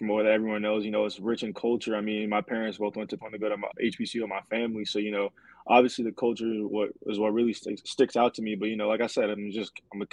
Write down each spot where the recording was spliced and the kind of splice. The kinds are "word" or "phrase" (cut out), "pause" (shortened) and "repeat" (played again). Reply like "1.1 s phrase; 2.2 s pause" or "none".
3.2 s phrase; 3.7 s word